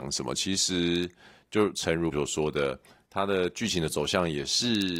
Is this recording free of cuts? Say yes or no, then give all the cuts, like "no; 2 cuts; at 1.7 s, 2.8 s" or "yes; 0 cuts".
no; 1 cut; at 2.1 s